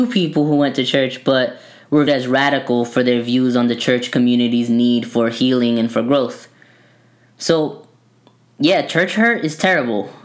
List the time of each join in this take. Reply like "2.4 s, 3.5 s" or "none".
2.1 s